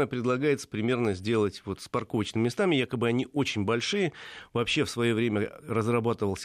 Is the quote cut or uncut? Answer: uncut